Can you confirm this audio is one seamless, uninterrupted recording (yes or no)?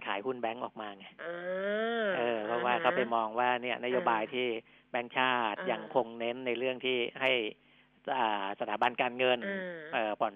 yes